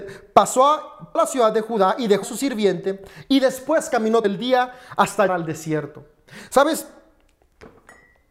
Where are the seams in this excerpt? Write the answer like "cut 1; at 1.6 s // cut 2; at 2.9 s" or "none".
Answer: cut 1; at 1.2 s // cut 2; at 2.2 s // cut 3; at 4.2 s // cut 4; at 5.3 s